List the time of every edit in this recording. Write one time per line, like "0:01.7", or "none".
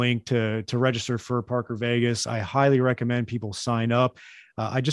none